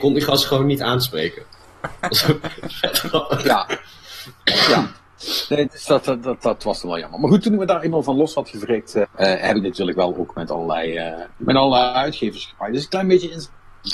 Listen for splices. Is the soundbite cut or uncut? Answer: cut